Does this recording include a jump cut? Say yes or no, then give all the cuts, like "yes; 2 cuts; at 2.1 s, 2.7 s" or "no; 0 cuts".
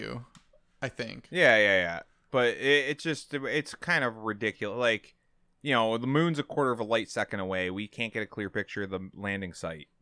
no; 0 cuts